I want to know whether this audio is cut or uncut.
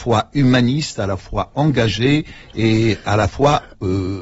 uncut